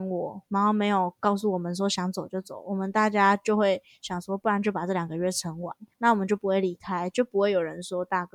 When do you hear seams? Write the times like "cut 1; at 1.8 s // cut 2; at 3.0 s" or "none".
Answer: cut 1; at 5.9 s